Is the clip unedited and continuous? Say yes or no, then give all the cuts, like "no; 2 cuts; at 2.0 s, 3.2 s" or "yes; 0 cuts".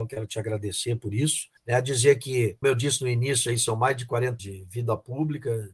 no; 3 cuts; at 1.6 s, 2.6 s, 4.4 s